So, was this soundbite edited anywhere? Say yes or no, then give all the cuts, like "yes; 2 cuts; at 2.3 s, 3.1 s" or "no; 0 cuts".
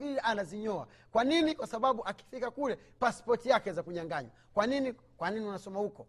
no; 0 cuts